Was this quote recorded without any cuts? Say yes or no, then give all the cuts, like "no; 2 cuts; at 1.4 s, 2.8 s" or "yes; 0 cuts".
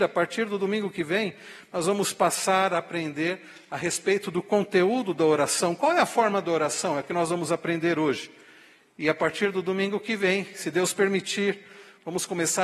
yes; 0 cuts